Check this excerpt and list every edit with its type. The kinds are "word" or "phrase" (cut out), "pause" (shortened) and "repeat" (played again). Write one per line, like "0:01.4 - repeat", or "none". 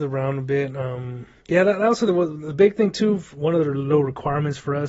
0:01.4 - pause